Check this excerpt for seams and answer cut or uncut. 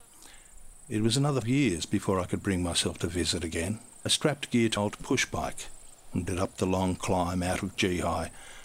cut